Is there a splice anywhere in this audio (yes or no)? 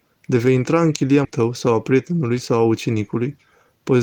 yes